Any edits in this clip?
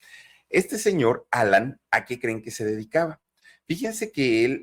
no; 0 cuts

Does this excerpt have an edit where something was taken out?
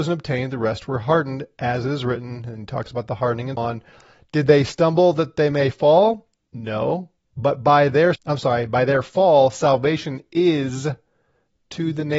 yes; 2 cuts; at 3.6 s, 8.1 s

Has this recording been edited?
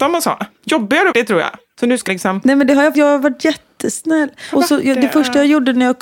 yes; 4 cuts; at 1.1 s, 2.1 s, 2.9 s, 4.5 s

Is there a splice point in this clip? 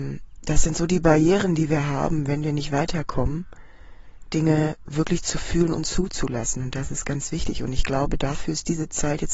no; 0 cuts

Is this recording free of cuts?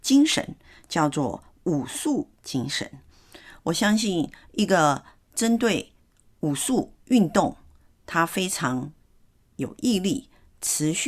no; 1 cut; at 7.0 s

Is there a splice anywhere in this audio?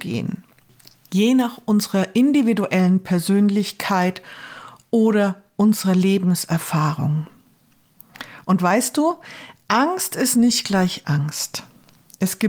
no; 0 cuts

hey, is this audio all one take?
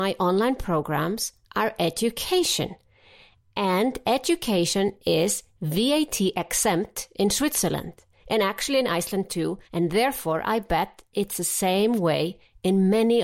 no; 1 cut; at 9.7 s

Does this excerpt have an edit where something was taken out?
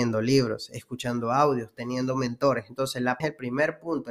yes; 1 cut; at 3.2 s

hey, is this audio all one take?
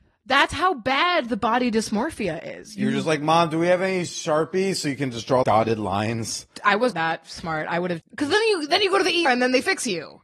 no; 4 cuts; at 5.4 s, 6.9 s, 8.0 s, 9.3 s

